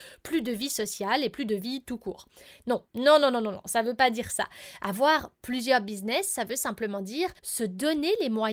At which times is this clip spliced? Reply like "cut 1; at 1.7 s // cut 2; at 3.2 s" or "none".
cut 1; at 2.9 s // cut 2; at 7.4 s